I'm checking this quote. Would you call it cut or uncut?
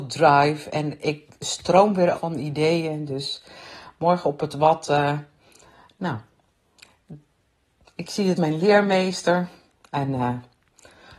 cut